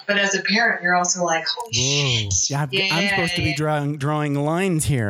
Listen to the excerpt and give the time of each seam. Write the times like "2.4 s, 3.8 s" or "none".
none

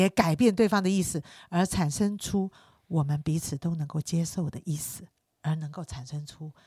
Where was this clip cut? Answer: none

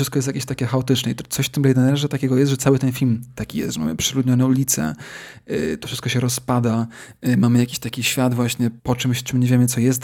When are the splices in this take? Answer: 8.8 s

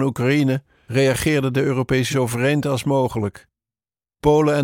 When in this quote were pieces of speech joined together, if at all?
2.1 s

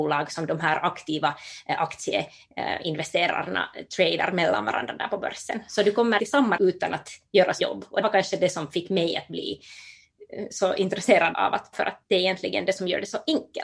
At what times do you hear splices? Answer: 6.2 s, 6.6 s, 7.6 s, 8.0 s, 11.3 s, 11.7 s

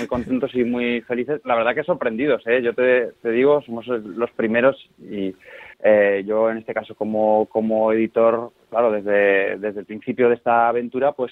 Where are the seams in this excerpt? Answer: 5.7 s

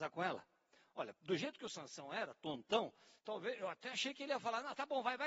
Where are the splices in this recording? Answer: 3.2 s

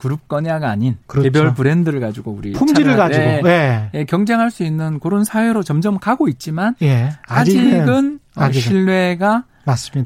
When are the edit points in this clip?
1.0 s

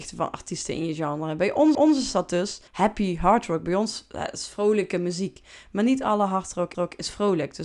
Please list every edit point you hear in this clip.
1.7 s, 2.7 s, 6.7 s

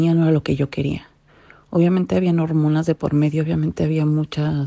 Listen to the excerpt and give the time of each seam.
none

